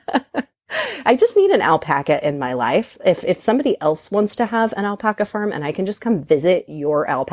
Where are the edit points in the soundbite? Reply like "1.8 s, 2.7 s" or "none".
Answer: none